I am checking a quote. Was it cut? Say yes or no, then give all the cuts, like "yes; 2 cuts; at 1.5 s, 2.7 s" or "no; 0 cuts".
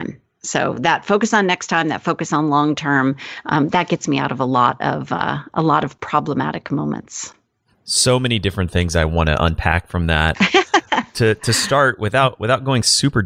no; 0 cuts